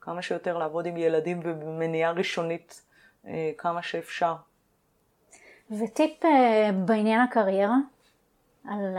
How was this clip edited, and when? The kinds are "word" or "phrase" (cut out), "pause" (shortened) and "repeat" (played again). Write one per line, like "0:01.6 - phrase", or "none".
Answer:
none